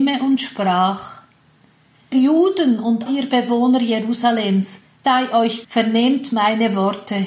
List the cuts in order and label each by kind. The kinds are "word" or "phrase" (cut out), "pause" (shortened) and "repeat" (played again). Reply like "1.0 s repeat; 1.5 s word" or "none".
2.1 s word; 3.1 s word; 5.0 s word; 5.6 s word